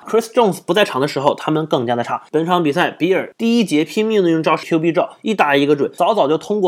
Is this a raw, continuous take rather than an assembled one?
no; 1 cut; at 4.6 s

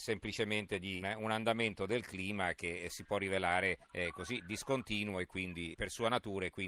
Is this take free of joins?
no; 3 cuts; at 1.0 s, 3.8 s, 5.7 s

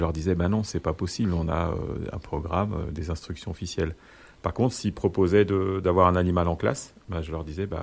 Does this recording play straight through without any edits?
yes; 0 cuts

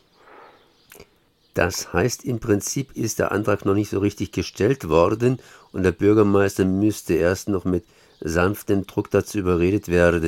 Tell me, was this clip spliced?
no; 0 cuts

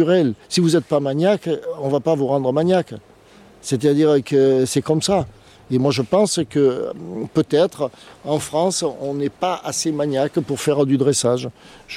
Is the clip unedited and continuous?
yes; 0 cuts

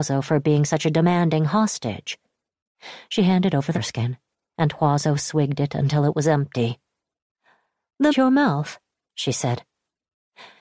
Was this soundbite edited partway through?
yes; 2 cuts; at 3.7 s, 8.1 s

